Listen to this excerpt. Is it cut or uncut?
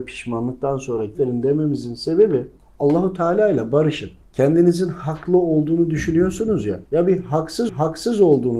cut